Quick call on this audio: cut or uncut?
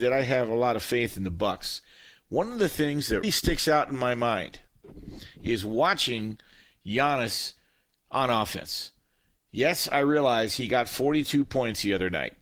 cut